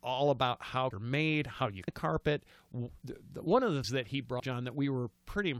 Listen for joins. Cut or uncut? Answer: cut